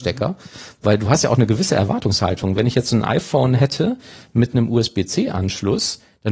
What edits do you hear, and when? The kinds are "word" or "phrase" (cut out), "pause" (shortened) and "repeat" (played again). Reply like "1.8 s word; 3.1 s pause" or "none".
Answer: none